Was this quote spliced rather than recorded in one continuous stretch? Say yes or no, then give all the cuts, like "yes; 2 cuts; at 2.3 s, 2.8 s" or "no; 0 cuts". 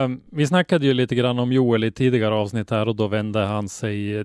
no; 0 cuts